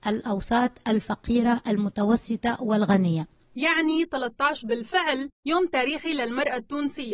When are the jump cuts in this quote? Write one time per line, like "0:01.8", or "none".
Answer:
0:04.6

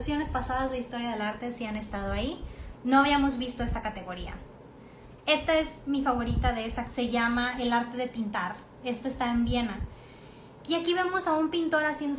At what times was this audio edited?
0:06.9

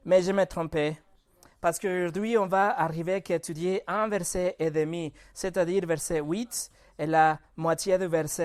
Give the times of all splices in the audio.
none

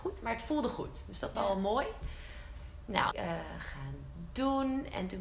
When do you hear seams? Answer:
0:01.3
0:03.1

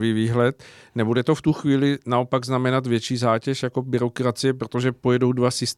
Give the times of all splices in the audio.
none

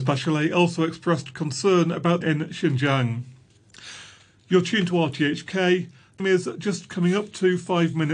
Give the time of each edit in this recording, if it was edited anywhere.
0:02.2
0:06.2

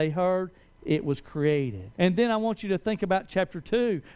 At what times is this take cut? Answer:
0:01.9

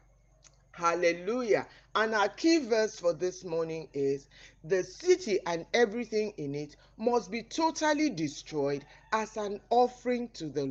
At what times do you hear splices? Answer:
none

